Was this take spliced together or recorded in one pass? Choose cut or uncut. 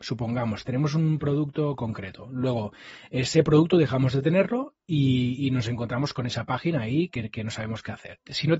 uncut